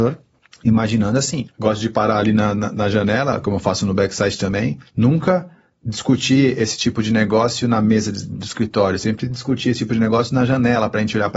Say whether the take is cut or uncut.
uncut